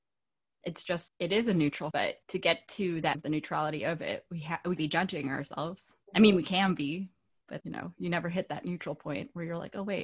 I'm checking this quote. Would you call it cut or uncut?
cut